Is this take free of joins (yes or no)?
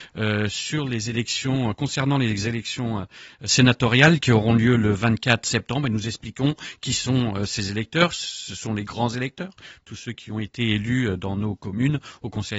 yes